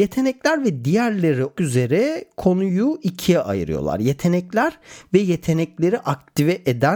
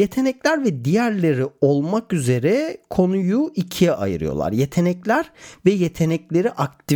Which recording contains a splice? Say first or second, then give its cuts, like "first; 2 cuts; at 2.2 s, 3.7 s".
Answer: first; 1 cut; at 1.5 s